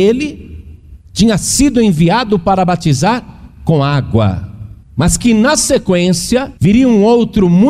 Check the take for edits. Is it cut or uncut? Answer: cut